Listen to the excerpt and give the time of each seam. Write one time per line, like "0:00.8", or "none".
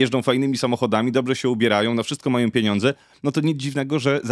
none